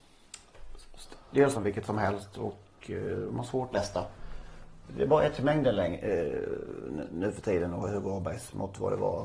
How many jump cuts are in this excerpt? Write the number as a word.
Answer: three